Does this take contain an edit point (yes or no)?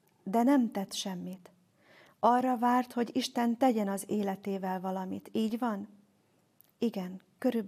no